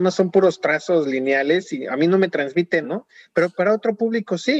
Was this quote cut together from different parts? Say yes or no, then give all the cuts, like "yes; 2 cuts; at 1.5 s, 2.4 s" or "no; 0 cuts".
yes; 1 cut; at 2.8 s